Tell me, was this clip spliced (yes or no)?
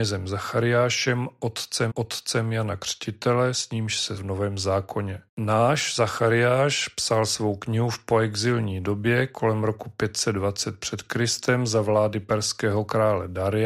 yes